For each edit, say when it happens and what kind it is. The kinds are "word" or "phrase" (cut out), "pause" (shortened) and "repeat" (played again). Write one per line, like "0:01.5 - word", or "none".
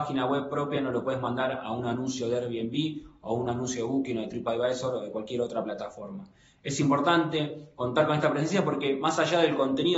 none